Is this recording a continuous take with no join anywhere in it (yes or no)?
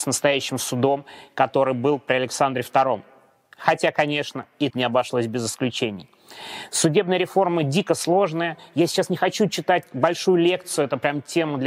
no